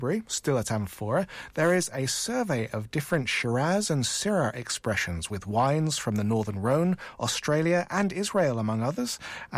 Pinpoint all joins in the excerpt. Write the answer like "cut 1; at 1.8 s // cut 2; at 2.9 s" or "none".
none